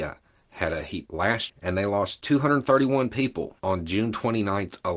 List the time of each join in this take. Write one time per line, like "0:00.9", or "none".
0:01.1
0:01.5
0:03.6